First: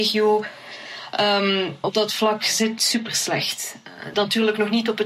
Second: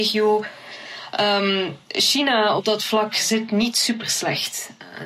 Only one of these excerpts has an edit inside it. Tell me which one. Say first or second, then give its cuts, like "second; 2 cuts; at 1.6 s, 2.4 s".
first; 3 cuts; at 1.8 s, 2.8 s, 4.1 s